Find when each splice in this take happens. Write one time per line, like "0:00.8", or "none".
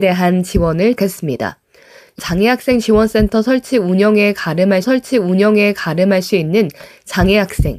0:01.0
0:02.2
0:04.8